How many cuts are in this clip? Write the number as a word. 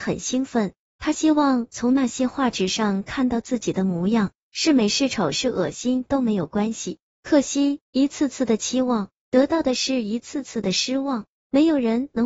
one